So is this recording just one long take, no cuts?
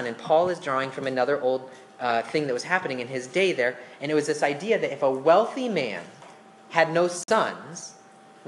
yes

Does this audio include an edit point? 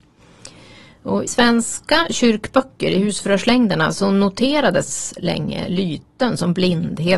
yes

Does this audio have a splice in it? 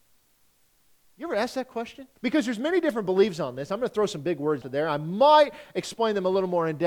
yes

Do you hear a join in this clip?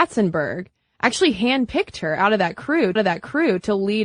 yes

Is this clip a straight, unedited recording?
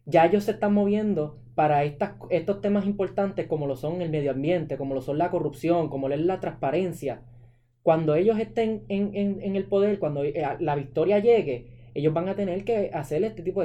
yes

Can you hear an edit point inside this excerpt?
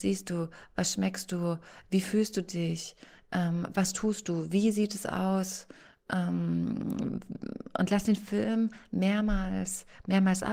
no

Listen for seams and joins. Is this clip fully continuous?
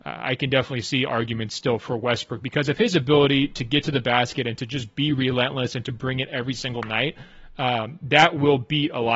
yes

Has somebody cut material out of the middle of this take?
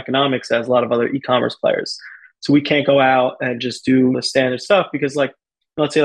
yes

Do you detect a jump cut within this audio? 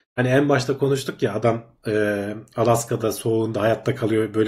no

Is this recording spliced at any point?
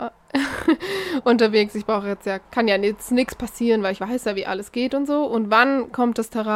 yes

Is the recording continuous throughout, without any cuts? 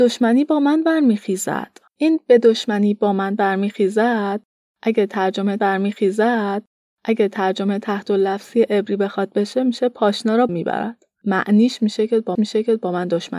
no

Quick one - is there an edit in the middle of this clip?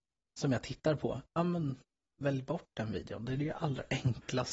no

